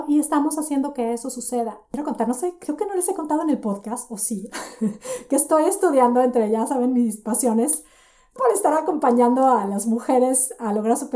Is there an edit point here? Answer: yes; 1 cut; at 8.4 s

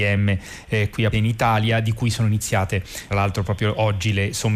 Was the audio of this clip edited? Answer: yes; 2 cuts; at 1.1 s, 3.1 s

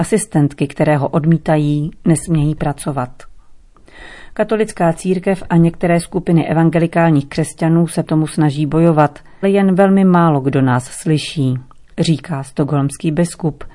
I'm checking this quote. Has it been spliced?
yes; 2 cuts; at 8.0 s, 9.4 s

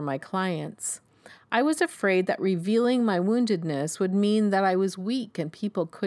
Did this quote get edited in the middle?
no; 0 cuts

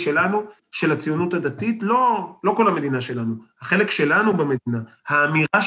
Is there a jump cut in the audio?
no; 0 cuts

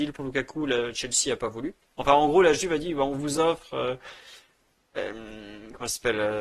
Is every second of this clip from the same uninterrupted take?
yes; 0 cuts

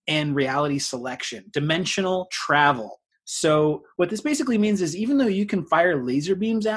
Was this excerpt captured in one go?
no; 1 cut; at 3.1 s

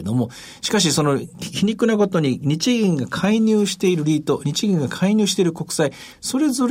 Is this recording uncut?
yes; 0 cuts

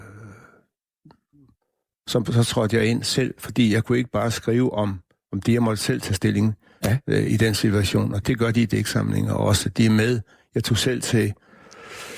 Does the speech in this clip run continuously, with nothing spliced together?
no; 1 cut; at 8.2 s

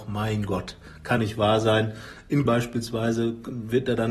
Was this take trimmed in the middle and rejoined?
yes; 2 cuts; at 1.2 s, 2.5 s

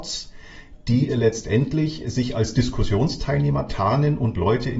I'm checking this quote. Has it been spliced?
no; 0 cuts

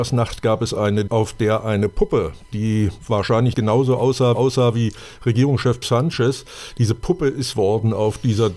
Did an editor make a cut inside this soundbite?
yes; 5 cuts; at 1.1 s, 3.5 s, 4.4 s, 5.8 s, 7.5 s

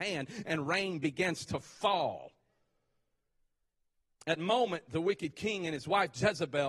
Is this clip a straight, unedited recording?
no; 1 cut; at 4.4 s

